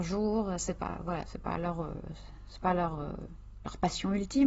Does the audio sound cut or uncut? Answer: uncut